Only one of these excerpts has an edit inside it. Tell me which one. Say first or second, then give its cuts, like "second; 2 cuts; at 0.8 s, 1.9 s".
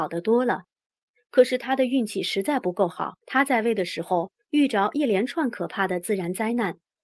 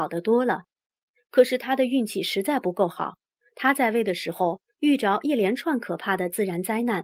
first; 1 cut; at 3.2 s